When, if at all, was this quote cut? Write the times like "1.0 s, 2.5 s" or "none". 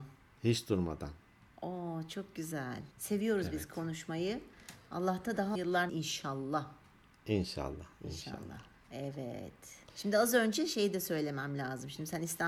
2.9 s, 5.5 s, 5.9 s, 9.9 s

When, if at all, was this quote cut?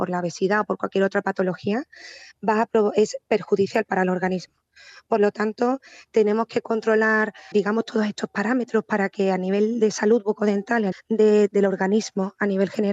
7.5 s, 10.9 s

